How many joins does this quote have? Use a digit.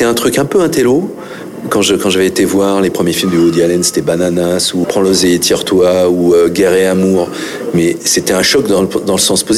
1